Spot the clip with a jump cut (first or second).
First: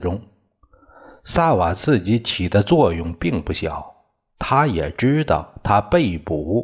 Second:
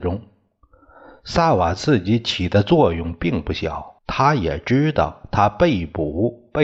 second